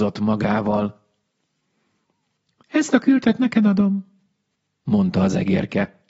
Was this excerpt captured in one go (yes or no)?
yes